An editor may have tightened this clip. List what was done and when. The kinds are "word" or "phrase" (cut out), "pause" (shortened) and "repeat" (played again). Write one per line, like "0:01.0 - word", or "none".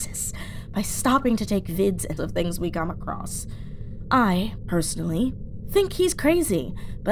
0:02.2 - word